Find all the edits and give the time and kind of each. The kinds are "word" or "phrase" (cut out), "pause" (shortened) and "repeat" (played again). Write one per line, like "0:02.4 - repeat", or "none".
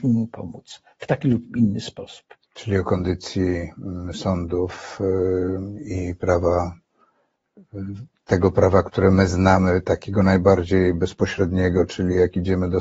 0:02.5 - pause